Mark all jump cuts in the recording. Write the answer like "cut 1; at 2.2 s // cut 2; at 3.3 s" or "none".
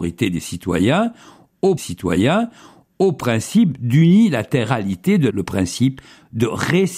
cut 1; at 1.8 s // cut 2; at 5.3 s

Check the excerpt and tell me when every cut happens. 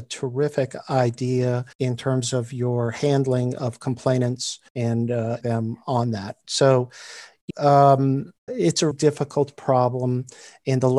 cut 1; at 1.7 s // cut 2; at 4.7 s // cut 3; at 5.4 s // cut 4; at 7.5 s // cut 5; at 8.5 s // cut 6; at 8.9 s

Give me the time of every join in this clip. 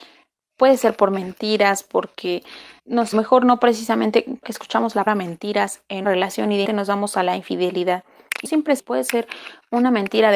cut 1; at 2.8 s // cut 2; at 3.1 s // cut 3; at 4.4 s // cut 4; at 5.1 s // cut 5; at 6.0 s // cut 6; at 6.7 s // cut 7; at 8.5 s // cut 8; at 8.8 s

